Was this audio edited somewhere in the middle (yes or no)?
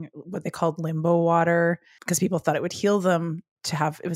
no